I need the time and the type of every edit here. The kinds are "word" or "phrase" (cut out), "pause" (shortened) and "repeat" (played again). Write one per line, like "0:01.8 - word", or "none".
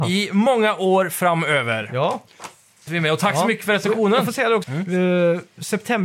0:02.9 - word
0:04.6 - word